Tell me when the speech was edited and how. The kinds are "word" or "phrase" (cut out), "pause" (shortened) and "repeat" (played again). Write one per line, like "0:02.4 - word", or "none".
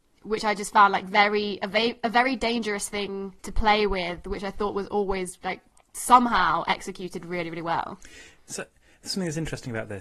0:03.4 - pause

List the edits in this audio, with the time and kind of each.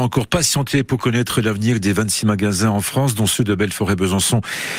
none

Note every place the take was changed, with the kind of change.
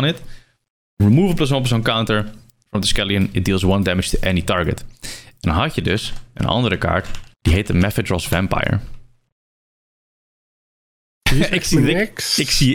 0:07.3 - pause

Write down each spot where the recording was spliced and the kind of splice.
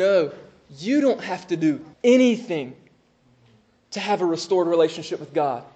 0:01.9 - pause

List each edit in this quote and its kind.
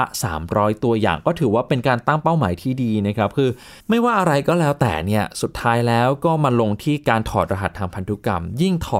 0:03.8 - pause

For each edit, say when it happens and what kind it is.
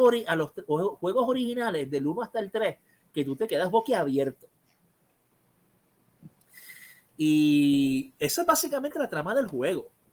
none

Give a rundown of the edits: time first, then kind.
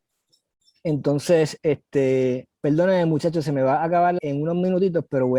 0:02.5 - pause
0:04.2 - word

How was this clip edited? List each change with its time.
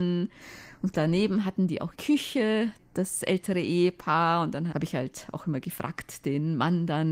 0:00.9 - word
0:01.9 - word
0:04.7 - word

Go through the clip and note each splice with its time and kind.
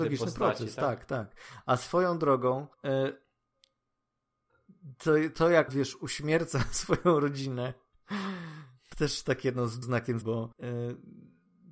0:02.7 - pause
0:05.7 - word
0:08.9 - word
0:09.8 - word
0:10.2 - word
0:10.5 - pause

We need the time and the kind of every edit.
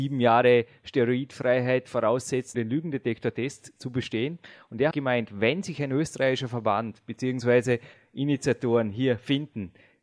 0:02.5 - word
0:04.9 - word

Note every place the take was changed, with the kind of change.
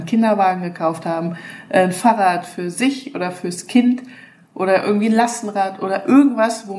none

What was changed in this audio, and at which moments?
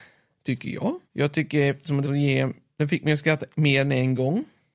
0:01.0 - pause
0:02.0 - word

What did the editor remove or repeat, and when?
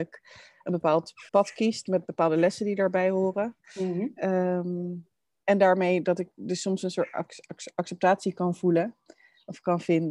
0:01.3 - pause

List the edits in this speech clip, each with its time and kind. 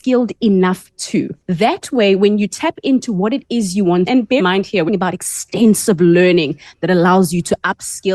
0:01.4 - pause
0:04.1 - phrase
0:04.4 - word
0:04.9 - phrase

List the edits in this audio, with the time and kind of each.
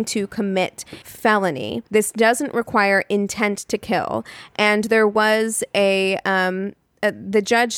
0:01.0 - word
0:01.9 - pause

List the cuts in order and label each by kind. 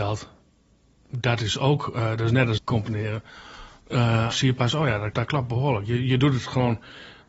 0:02.6 - phrase
0:04.3 - word
0:05.1 - word

